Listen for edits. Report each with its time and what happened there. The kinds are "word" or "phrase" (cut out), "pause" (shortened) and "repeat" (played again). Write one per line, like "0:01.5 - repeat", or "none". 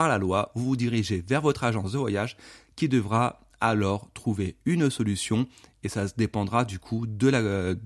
none